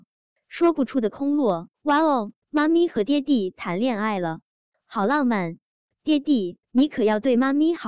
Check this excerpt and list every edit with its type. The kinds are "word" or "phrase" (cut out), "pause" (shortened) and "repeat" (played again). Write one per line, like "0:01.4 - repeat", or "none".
0:01.7 - pause
0:02.4 - pause
0:06.6 - pause